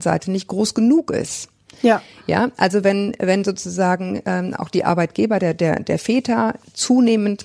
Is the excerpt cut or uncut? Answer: uncut